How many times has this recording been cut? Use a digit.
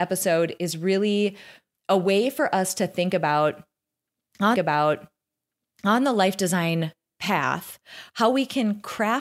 1